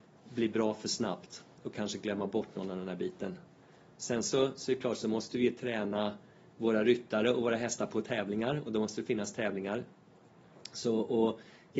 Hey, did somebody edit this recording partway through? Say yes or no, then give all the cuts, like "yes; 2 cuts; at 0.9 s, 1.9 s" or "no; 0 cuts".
no; 0 cuts